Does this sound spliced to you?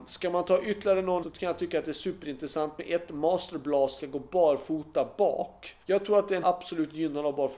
yes; 4 cuts; at 1.2 s, 4.0 s, 5.8 s, 6.4 s

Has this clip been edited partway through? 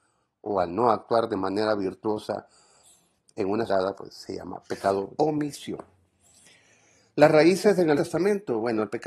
yes; 3 cuts; at 3.7 s, 5.2 s, 8.0 s

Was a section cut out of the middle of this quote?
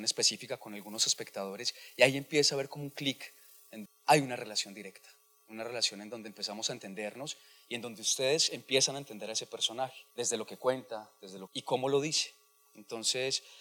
yes; 3 cuts; at 3.9 s, 10.1 s, 11.5 s

